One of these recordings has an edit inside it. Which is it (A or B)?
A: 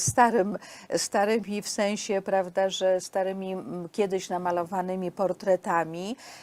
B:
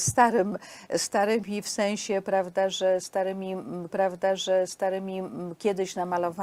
B